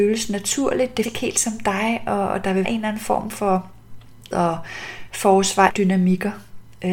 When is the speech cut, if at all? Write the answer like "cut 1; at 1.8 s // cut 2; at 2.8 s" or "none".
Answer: cut 1; at 1.0 s // cut 2; at 2.6 s // cut 3; at 4.3 s // cut 4; at 5.7 s